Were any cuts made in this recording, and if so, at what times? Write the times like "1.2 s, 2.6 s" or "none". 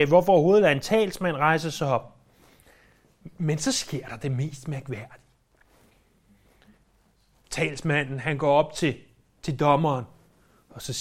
none